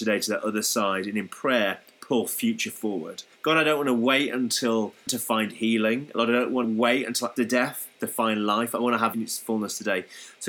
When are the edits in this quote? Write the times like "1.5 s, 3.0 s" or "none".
3.3 s, 5.1 s, 6.6 s, 7.4 s, 9.1 s